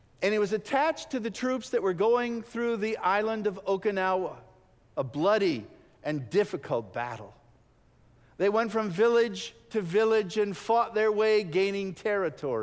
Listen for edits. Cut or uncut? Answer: uncut